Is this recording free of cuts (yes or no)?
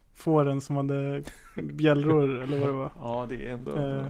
yes